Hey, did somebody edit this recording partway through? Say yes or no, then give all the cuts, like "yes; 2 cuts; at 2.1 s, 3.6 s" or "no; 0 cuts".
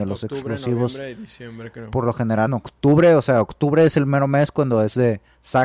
yes; 1 cut; at 2.5 s